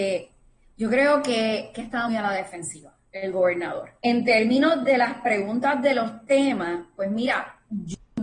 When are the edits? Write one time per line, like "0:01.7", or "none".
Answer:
0:02.1
0:04.0